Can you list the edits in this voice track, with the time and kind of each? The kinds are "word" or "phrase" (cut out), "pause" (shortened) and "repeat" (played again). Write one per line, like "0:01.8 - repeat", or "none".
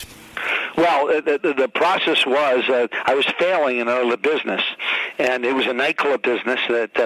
none